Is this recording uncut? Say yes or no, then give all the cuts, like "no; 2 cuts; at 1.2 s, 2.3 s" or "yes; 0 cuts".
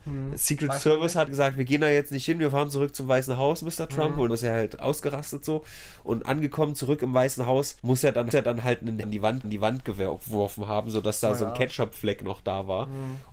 no; 6 cuts; at 1.3 s, 4.3 s, 7.8 s, 8.3 s, 9.0 s, 9.4 s